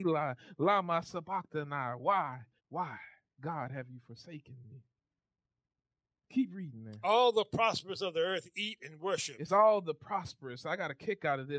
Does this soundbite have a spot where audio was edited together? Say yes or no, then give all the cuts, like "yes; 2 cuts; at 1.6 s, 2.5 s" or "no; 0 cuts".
yes; 2 cuts; at 2.6 s, 9.5 s